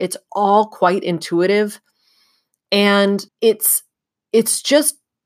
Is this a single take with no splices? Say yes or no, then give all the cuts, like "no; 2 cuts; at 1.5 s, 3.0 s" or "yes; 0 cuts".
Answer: no; 1 cut; at 3.3 s